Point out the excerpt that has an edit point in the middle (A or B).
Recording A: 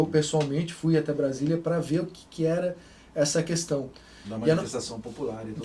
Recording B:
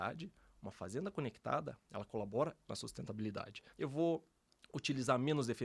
B